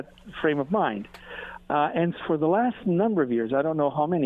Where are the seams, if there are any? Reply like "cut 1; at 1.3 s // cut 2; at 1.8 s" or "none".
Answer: cut 1; at 2.2 s

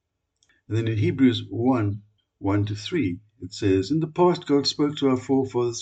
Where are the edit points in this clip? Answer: cut 1; at 2.2 s

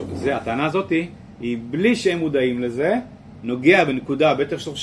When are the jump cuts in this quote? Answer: none

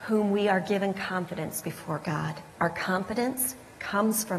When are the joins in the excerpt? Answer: cut 1; at 2.5 s

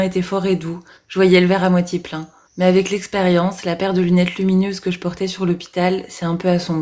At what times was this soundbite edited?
cut 1; at 0.9 s // cut 2; at 2.4 s

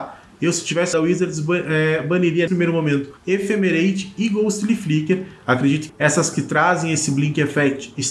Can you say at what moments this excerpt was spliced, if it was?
cut 1; at 0.9 s // cut 2; at 2.5 s // cut 3; at 3.2 s // cut 4; at 5.9 s // cut 5; at 6.3 s

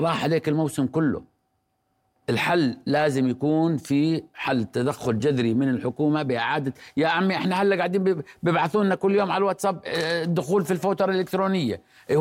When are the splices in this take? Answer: none

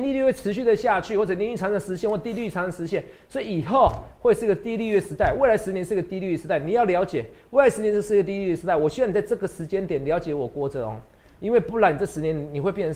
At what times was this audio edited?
none

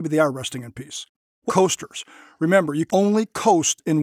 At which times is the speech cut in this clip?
cut 1; at 1.5 s // cut 2; at 2.9 s

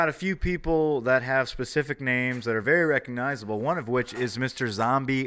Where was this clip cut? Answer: none

